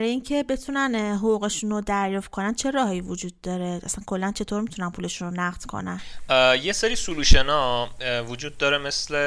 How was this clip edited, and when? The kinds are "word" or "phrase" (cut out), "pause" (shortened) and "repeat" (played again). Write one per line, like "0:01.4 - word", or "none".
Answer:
none